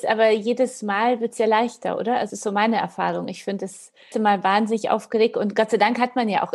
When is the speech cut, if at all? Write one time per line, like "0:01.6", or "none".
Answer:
0:02.3
0:04.1